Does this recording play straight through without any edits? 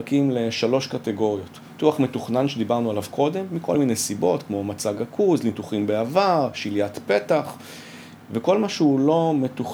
yes; 0 cuts

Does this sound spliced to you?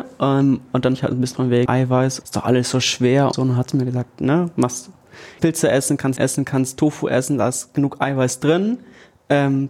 yes; 8 cuts; at 0.9 s, 1.3 s, 1.7 s, 2.2 s, 3.3 s, 4.1 s, 5.4 s, 6.2 s

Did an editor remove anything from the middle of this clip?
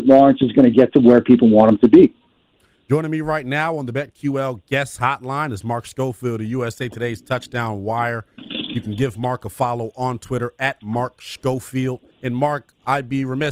yes; 1 cut; at 12.1 s

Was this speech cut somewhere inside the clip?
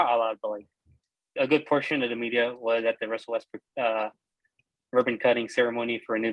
yes; 1 cut; at 1.4 s

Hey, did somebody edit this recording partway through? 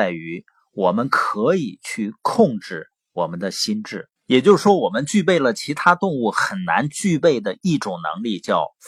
yes; 1 cut; at 4.2 s

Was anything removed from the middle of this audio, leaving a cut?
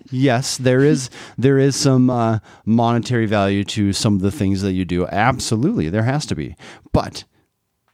no; 0 cuts

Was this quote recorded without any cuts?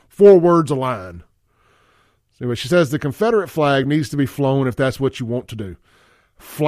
yes; 0 cuts

